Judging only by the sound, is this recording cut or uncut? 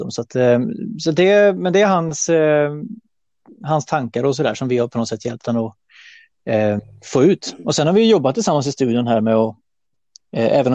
uncut